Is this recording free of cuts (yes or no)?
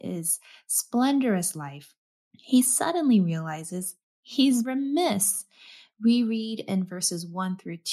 no